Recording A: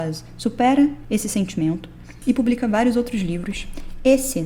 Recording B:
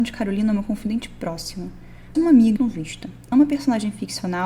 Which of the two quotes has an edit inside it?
B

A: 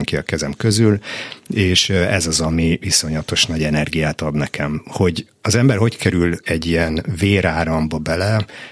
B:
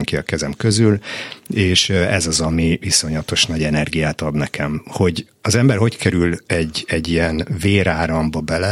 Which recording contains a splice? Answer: A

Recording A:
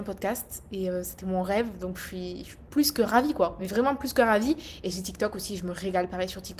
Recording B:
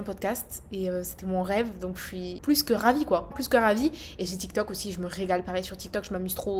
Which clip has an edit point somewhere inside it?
B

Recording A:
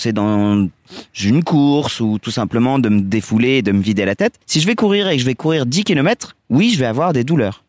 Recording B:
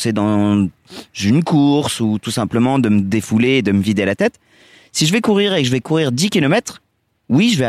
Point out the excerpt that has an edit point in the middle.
A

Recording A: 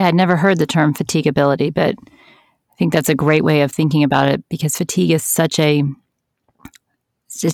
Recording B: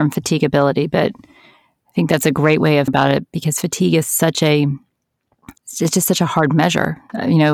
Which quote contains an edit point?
B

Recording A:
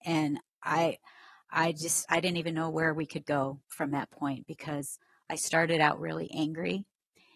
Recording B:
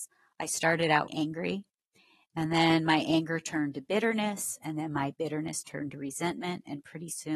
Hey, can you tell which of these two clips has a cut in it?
B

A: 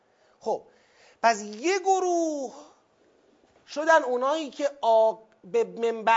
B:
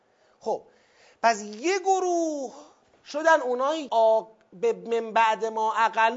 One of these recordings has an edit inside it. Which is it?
B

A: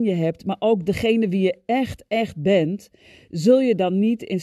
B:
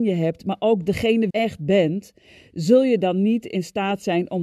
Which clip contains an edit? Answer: B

